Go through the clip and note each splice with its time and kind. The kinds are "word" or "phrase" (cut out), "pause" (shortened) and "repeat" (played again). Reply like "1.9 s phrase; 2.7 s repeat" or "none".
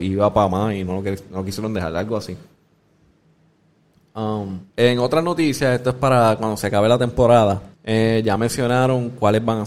4.7 s pause; 7.7 s pause